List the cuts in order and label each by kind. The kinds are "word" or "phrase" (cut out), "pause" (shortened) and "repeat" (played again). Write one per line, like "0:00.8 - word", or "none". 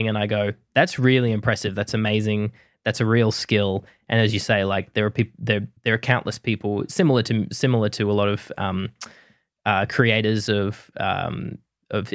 0:05.8 - pause

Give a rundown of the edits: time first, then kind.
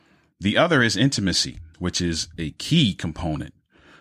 0:01.7 - pause

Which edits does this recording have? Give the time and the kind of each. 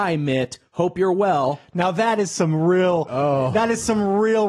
none

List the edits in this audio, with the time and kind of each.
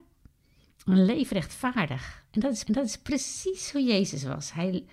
0:02.3 - pause
0:02.7 - repeat

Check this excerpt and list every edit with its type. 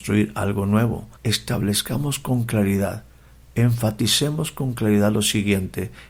0:01.2 - pause

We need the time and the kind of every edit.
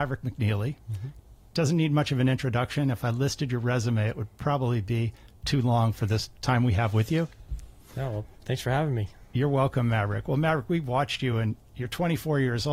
none

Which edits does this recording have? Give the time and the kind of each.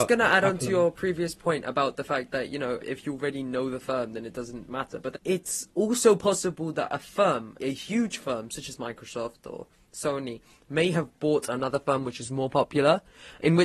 0:02.8 - word
0:04.7 - word
0:05.1 - word
0:07.6 - word

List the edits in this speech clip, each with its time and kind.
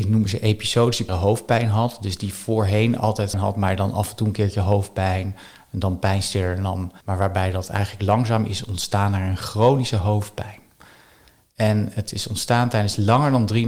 0:01.1 - word
0:03.3 - word
0:07.0 - pause

